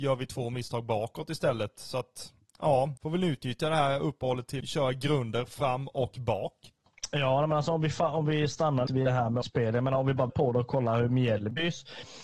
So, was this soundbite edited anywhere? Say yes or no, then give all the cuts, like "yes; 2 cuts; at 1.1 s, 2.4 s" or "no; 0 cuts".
yes; 5 cuts; at 3.0 s, 4.6 s, 8.9 s, 9.4 s, 10.3 s